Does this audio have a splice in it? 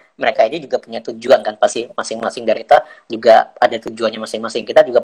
yes; 1 cut; at 2.5 s

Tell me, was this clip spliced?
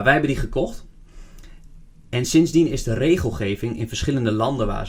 no; 0 cuts

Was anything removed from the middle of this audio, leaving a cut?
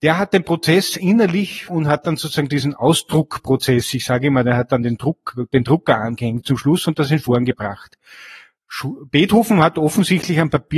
yes; 1 cut; at 1.7 s

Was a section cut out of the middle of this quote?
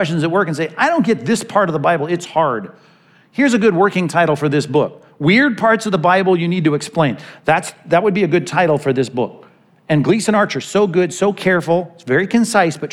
no; 0 cuts

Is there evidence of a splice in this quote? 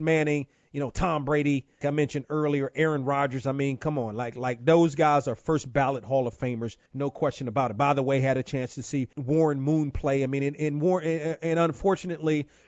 yes; 3 cuts; at 1.8 s, 6.9 s, 9.1 s

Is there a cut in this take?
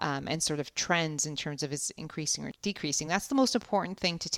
no; 0 cuts

